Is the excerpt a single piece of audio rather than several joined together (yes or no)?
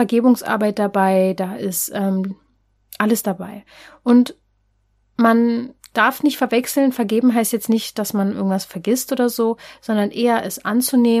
yes